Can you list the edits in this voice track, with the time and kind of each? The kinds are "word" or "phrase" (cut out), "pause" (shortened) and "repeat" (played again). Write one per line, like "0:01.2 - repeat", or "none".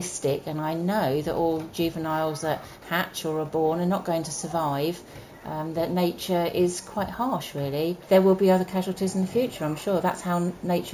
0:08.0 - pause